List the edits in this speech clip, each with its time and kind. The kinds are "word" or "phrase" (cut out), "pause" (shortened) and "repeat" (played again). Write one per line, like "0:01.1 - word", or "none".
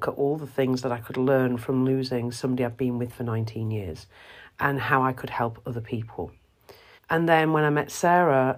0:07.0 - pause